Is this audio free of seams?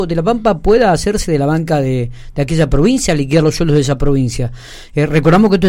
yes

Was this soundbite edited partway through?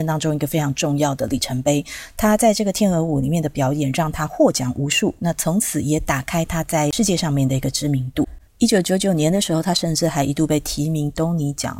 yes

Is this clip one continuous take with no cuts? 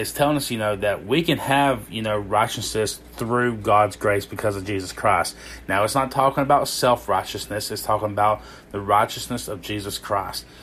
yes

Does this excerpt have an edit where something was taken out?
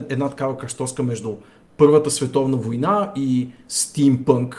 no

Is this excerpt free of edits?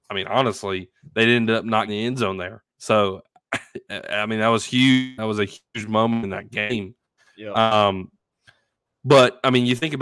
no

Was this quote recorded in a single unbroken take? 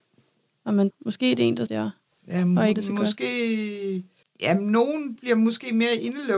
no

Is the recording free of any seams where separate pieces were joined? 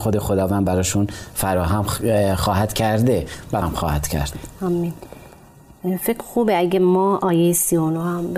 no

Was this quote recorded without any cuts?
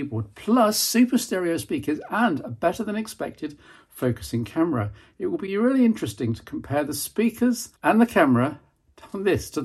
no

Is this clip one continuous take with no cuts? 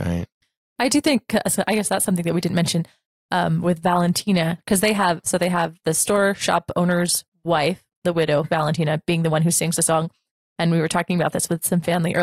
yes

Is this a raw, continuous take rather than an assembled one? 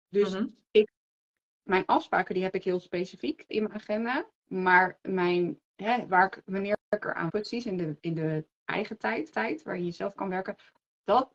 no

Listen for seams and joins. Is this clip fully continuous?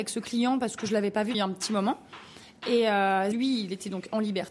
no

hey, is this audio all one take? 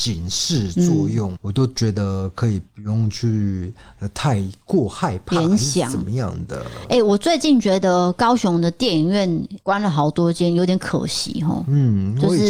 no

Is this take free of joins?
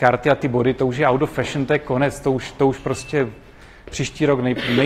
yes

